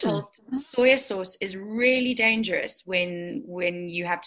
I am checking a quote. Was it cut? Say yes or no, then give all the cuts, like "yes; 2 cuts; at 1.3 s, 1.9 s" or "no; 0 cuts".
no; 0 cuts